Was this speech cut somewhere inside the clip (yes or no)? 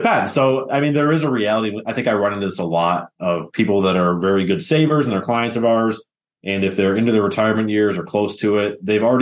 no